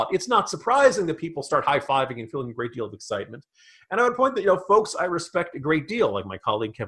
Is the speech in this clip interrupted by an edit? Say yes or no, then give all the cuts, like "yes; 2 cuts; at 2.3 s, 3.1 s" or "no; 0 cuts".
no; 0 cuts